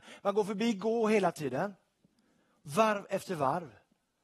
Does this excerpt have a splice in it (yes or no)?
no